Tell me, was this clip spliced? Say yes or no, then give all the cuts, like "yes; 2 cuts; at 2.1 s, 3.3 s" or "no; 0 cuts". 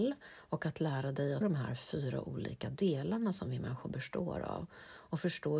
yes; 1 cut; at 1.4 s